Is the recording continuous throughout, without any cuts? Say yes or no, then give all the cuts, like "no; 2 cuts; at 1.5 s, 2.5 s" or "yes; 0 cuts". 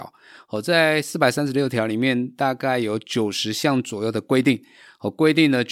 yes; 0 cuts